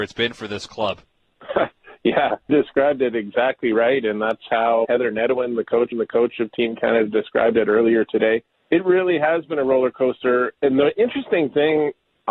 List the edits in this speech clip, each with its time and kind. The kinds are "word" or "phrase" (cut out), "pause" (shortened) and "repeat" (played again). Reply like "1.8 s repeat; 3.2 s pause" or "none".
1.0 s pause; 2.5 s word; 4.8 s word; 5.9 s repeat; 8.6 s pause; 10.6 s pause

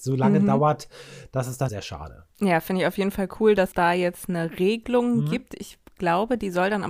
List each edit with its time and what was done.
1.7 s phrase; 2.3 s pause; 3.7 s word

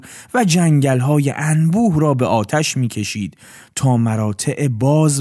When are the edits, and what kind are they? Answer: none

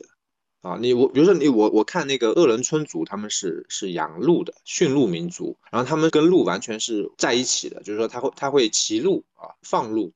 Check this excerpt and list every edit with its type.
5.7 s pause

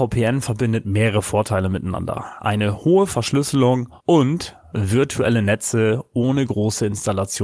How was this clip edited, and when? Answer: 4.0 s pause

